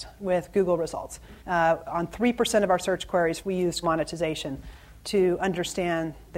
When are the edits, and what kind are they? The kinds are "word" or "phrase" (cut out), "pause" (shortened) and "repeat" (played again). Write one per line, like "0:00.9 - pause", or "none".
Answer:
0:01.4 - pause
0:03.4 - phrase
0:03.8 - word